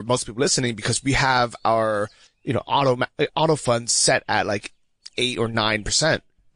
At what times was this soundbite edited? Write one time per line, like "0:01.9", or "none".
none